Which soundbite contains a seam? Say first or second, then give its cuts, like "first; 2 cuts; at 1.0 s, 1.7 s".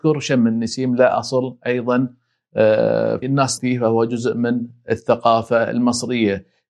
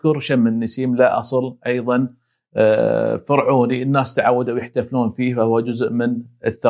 first; 2 cuts; at 3.2 s, 3.6 s